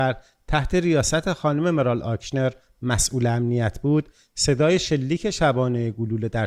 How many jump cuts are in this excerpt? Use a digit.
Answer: 0